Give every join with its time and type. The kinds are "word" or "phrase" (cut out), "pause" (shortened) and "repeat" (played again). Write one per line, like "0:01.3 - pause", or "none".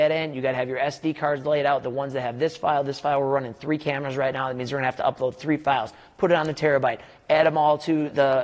none